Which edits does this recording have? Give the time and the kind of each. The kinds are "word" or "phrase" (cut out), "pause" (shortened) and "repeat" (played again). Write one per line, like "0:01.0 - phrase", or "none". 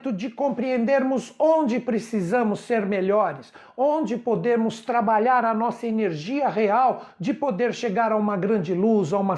none